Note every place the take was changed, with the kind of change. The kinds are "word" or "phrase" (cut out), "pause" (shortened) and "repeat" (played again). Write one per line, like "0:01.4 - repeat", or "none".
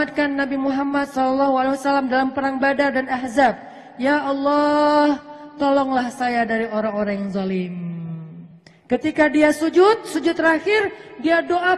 none